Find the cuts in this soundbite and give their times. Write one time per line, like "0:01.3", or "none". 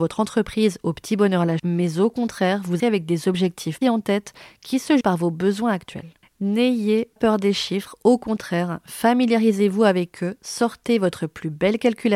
0:01.6
0:02.8
0:03.8
0:05.0
0:07.2